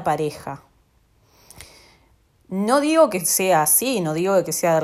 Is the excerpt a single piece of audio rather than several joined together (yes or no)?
yes